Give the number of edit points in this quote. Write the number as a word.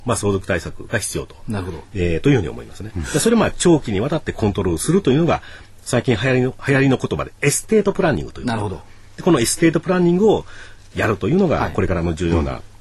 zero